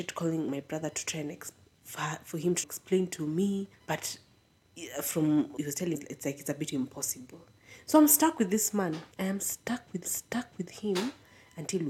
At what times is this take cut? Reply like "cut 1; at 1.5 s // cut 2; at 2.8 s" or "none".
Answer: cut 1; at 2.6 s // cut 2; at 3.7 s // cut 3; at 5.6 s // cut 4; at 5.9 s // cut 5; at 9.1 s // cut 6; at 10.0 s